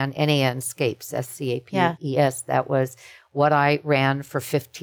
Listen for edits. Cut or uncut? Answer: uncut